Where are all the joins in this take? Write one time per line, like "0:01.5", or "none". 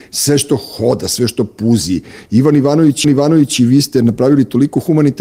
0:03.0

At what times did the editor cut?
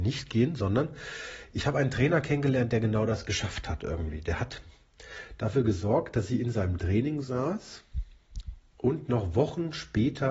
none

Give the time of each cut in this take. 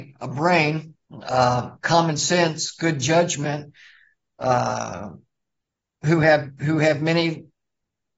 0:01.0

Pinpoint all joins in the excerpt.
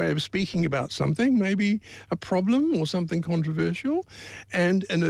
none

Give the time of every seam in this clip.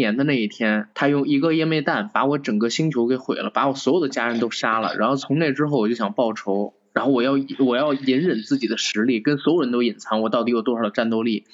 0:00.9

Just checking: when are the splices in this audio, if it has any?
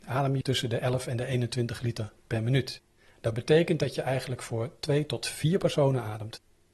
none

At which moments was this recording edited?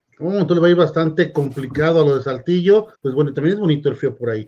0:03.0

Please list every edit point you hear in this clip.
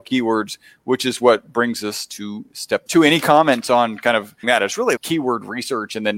0:02.9
0:04.4
0:05.0

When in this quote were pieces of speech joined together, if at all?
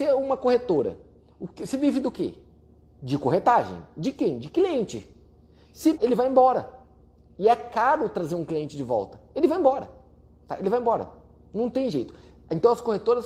0:05.9

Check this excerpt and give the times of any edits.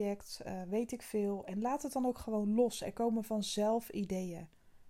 none

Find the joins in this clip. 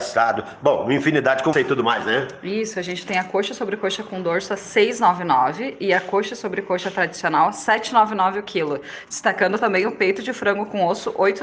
0:01.5

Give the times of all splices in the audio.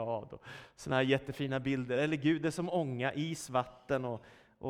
none

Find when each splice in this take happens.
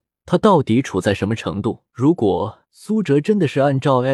0:01.9
0:02.6

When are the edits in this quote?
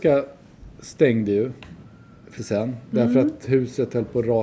0:02.4

